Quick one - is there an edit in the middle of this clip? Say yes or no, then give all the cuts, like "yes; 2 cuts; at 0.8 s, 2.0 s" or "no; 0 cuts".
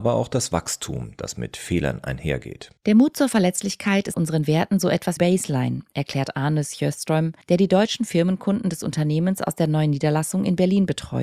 yes; 4 cuts; at 2.8 s, 4.1 s, 5.2 s, 7.4 s